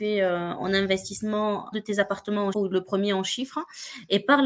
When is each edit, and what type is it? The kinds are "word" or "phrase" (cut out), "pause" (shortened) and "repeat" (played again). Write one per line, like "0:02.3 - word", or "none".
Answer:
0:01.7 - phrase
0:02.5 - word